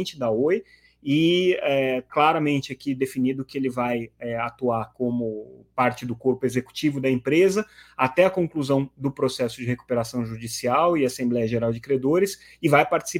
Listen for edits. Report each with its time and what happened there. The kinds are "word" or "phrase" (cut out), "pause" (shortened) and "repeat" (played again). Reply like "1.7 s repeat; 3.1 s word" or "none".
2.1 s word